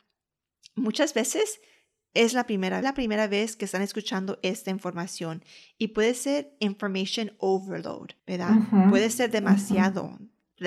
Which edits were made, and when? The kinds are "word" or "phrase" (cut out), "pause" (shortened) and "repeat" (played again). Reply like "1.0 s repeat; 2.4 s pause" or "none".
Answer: 2.8 s phrase; 8.2 s pause